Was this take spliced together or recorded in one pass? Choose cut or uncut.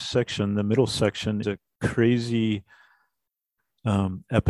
cut